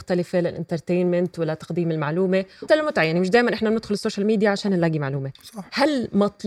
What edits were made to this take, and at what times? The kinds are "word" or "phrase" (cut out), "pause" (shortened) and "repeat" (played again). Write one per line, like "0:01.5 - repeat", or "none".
0:02.7 - word
0:05.3 - pause